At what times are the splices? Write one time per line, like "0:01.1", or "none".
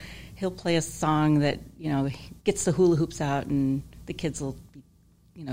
0:02.4